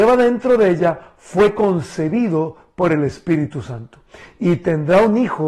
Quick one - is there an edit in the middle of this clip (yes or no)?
no